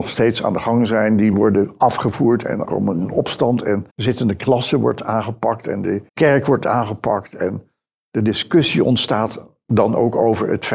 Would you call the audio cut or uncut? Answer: cut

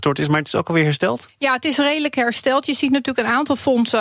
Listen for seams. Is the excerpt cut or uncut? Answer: uncut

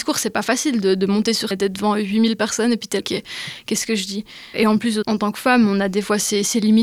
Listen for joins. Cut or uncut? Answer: cut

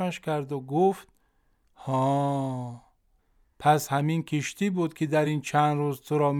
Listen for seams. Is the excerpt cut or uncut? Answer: uncut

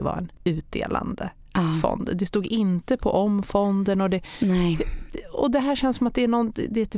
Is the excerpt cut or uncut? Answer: uncut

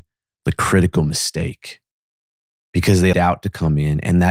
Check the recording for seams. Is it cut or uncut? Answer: cut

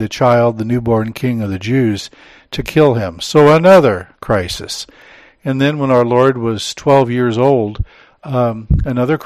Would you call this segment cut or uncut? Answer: uncut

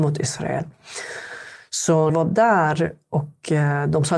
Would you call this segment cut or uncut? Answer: cut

